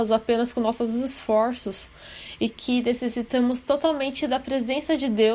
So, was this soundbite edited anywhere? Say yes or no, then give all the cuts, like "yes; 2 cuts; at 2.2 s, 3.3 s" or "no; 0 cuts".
no; 0 cuts